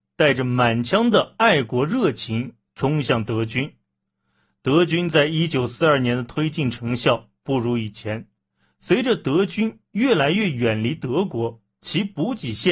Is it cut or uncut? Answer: uncut